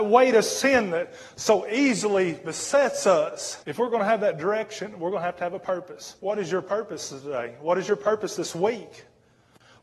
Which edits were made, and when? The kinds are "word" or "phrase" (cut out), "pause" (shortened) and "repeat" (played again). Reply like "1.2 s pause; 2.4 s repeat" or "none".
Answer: 3.6 s pause; 6.2 s pause

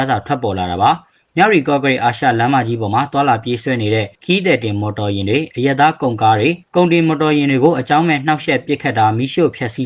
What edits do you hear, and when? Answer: 4.1 s pause; 6.6 s pause

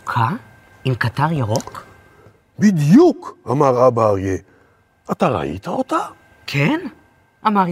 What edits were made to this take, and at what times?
none

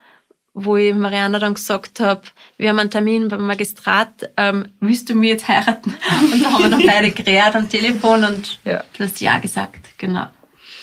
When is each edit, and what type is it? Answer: none

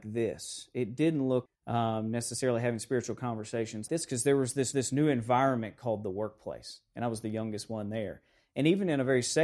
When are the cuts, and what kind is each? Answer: 1.5 s word; 3.9 s word; 4.7 s repeat

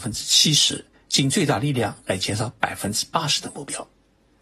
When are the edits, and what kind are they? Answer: 0.9 s pause

